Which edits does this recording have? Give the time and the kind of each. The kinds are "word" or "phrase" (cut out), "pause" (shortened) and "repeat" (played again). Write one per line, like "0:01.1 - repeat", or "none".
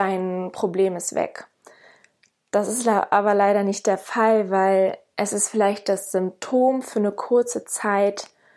none